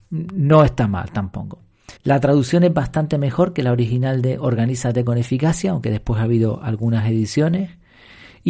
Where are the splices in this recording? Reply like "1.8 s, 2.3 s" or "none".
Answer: 2.0 s